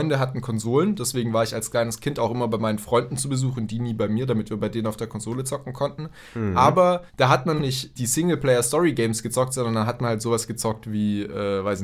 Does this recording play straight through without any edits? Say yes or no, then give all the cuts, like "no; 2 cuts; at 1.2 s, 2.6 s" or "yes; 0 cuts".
no; 3 cuts; at 7.1 s, 7.6 s, 8.0 s